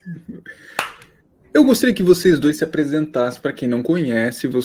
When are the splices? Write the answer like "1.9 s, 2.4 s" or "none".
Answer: none